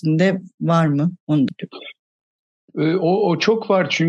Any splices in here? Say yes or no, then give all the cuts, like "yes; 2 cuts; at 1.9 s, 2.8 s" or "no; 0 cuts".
yes; 1 cut; at 1.5 s